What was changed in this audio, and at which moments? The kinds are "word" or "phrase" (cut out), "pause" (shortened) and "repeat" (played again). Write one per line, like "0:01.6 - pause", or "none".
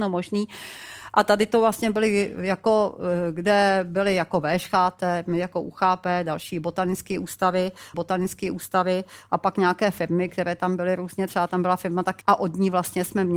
0:07.9 - repeat
0:12.2 - word